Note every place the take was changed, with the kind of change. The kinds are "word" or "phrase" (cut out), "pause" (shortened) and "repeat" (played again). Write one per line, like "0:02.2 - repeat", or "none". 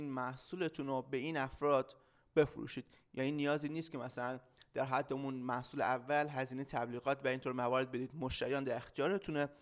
none